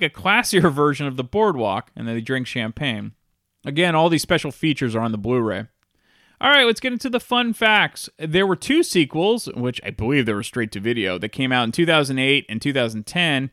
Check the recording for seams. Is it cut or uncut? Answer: cut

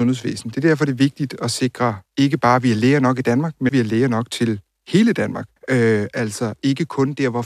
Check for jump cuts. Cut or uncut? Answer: cut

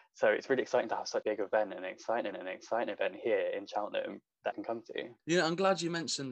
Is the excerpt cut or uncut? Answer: cut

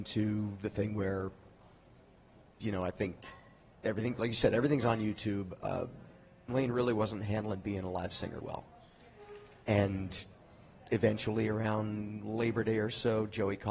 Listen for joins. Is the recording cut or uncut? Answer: cut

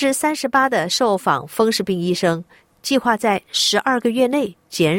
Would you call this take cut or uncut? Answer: uncut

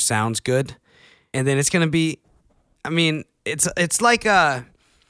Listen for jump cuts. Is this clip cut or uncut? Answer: uncut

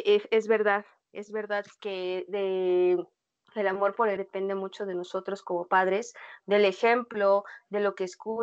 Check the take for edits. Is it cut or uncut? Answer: cut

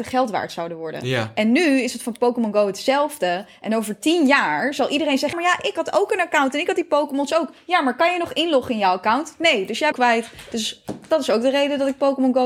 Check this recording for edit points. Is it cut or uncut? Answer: cut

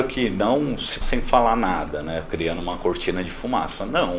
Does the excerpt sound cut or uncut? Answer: cut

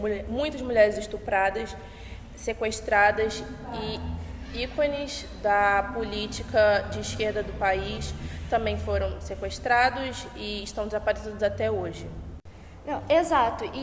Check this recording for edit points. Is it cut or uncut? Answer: uncut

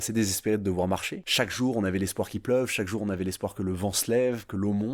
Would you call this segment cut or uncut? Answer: uncut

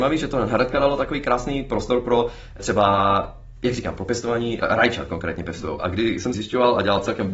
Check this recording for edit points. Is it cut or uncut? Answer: cut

